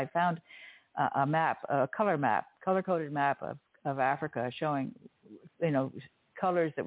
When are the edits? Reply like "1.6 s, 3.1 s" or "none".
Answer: none